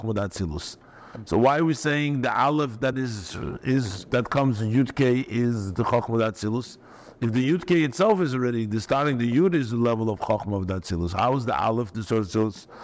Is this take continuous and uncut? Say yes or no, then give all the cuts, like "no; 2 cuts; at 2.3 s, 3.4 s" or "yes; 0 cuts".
yes; 0 cuts